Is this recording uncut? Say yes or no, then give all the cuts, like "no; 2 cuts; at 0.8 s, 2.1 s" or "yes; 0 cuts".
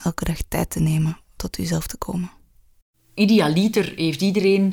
no; 1 cut; at 1.4 s